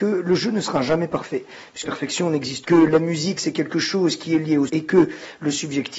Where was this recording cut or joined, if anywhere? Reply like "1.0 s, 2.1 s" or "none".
1.8 s, 2.6 s, 4.7 s